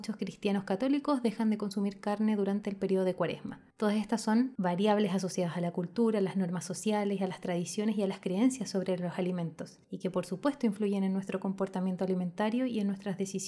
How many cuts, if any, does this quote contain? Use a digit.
2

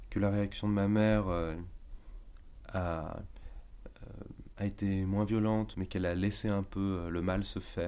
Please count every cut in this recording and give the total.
1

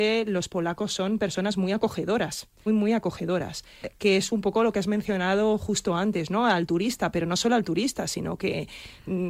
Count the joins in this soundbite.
1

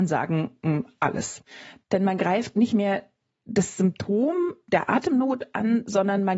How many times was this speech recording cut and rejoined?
0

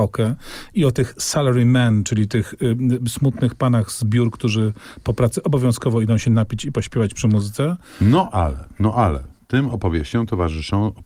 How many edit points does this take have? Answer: 0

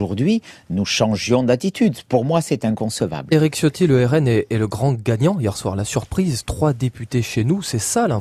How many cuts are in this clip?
0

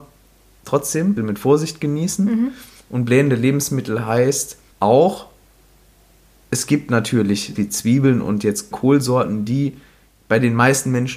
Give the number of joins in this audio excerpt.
4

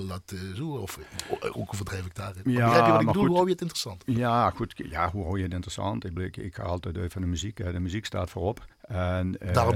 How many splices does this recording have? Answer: 3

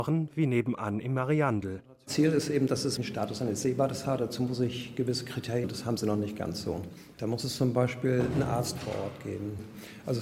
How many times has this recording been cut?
3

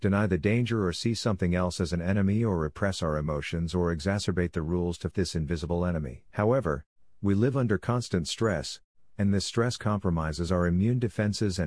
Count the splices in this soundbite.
2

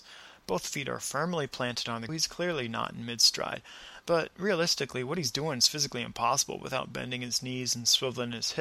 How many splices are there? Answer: 1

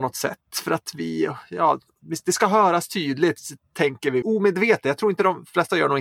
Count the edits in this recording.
1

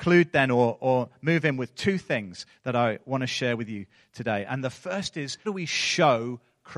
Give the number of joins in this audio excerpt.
1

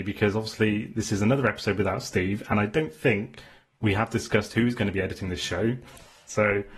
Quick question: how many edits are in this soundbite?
0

